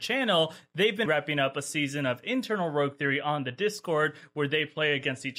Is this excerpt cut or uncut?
cut